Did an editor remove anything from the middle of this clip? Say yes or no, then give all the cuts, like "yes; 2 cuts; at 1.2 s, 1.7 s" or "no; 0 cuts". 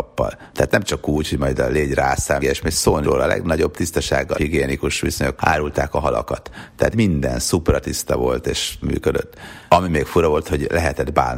yes; 6 cuts; at 2.4 s, 3.0 s, 4.3 s, 5.4 s, 6.9 s, 8.8 s